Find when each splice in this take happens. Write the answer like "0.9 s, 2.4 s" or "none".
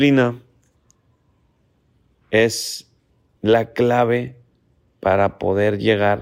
none